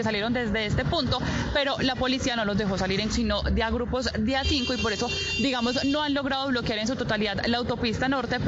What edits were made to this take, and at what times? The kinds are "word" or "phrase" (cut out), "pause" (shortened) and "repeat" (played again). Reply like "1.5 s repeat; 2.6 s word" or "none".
3.1 s word